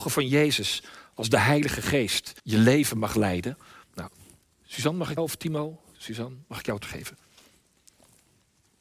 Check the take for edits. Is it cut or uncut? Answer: cut